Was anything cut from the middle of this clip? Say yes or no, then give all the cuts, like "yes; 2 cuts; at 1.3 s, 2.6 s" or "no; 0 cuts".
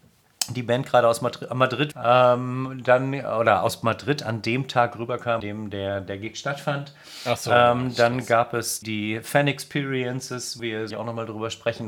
yes; 5 cuts; at 1.9 s, 5.4 s, 8.8 s, 10.6 s, 10.9 s